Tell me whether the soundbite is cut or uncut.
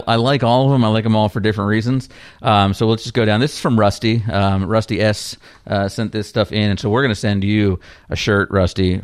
uncut